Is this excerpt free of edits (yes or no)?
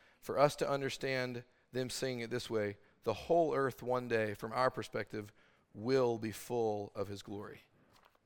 yes